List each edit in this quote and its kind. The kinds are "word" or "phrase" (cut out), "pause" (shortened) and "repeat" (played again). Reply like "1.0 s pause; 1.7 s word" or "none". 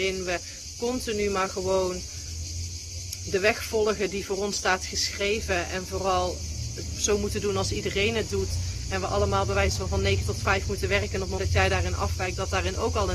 11.4 s word